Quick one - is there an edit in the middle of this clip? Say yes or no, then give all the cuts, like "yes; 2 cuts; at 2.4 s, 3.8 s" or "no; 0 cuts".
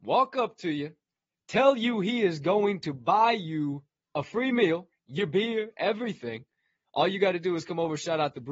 no; 0 cuts